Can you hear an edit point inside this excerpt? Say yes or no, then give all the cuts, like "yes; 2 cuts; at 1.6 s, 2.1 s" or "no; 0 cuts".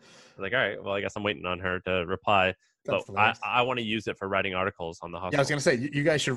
no; 0 cuts